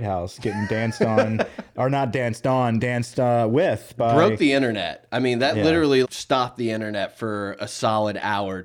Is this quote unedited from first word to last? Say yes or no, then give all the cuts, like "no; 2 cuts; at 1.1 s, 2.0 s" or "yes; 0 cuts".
no; 2 cuts; at 2.8 s, 6.0 s